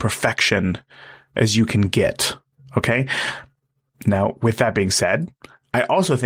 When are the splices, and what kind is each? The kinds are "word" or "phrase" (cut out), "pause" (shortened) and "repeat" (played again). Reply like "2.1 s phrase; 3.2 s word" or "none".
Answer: none